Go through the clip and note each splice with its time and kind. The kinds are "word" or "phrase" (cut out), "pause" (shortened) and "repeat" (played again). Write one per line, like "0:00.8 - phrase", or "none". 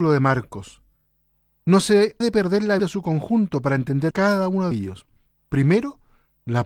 0:02.2 - word
0:02.8 - word
0:04.1 - word
0:04.7 - word